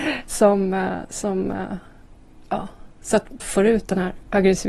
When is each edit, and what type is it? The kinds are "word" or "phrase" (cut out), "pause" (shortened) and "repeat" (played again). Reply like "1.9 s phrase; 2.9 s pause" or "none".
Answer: 3.4 s word

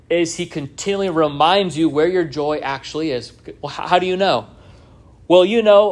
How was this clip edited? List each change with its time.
none

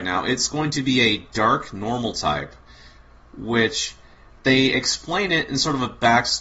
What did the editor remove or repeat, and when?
none

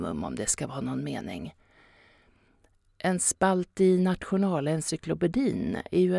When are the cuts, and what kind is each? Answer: none

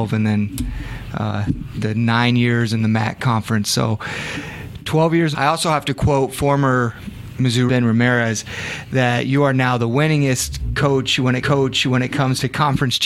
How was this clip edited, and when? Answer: 5.3 s phrase; 7.7 s phrase; 11.4 s repeat

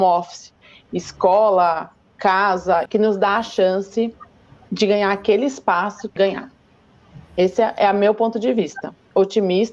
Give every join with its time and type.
2.9 s phrase; 4.7 s word; 6.2 s phrase

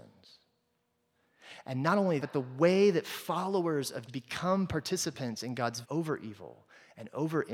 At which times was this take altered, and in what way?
2.2 s word; 4.1 s word; 5.8 s word

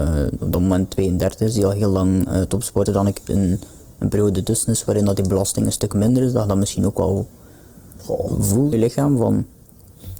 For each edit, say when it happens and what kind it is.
2.9 s phrase; 3.3 s word; 8.7 s word

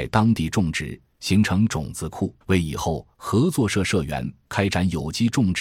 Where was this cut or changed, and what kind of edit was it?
2.4 s pause

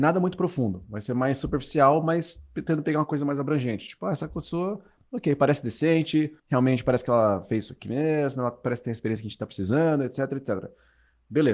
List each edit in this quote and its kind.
6.4 s pause

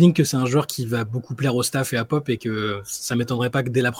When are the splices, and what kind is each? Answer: none

